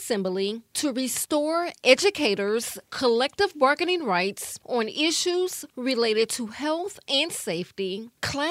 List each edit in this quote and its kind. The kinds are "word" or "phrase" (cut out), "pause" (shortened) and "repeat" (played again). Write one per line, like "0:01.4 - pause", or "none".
none

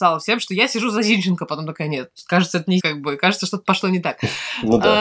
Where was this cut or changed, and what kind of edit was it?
0:02.8 - word

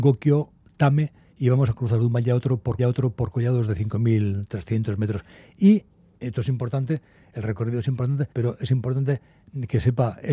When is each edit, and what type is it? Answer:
0:02.8 - repeat
0:08.3 - pause

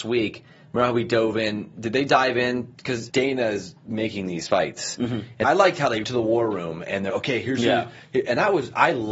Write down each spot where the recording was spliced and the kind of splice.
0:03.1 - word
0:05.4 - word
0:06.0 - word
0:07.1 - word

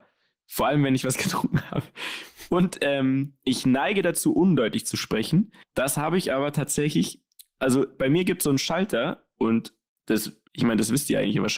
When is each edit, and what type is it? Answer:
0:05.6 - pause
0:10.5 - pause

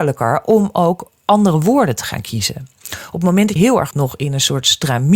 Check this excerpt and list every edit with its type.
0:03.6 - word
0:03.9 - word

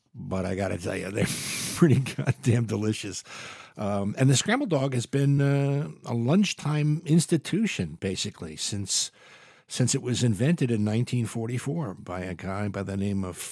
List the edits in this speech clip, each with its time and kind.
none

